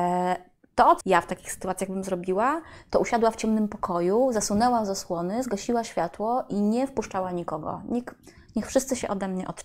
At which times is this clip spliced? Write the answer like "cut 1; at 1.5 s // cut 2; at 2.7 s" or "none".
cut 1; at 1.0 s